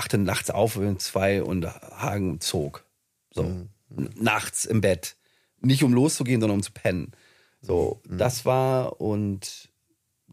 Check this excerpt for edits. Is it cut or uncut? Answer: uncut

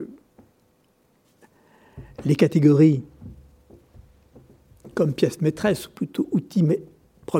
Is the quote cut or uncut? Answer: uncut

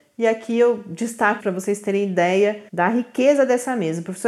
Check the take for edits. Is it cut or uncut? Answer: cut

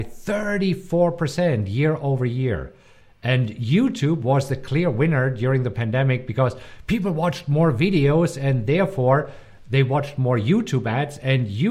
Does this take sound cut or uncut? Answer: uncut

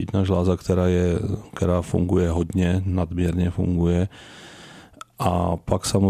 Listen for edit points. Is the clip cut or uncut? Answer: uncut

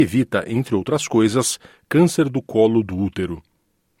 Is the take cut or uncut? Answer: uncut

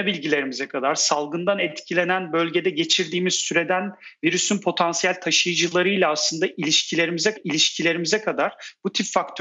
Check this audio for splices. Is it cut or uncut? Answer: cut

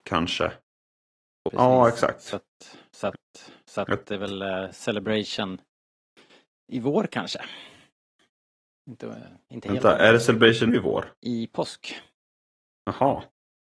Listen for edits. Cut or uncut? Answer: cut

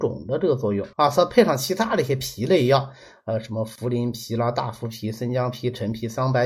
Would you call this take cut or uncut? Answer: cut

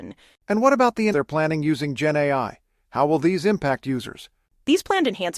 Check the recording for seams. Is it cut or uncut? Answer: cut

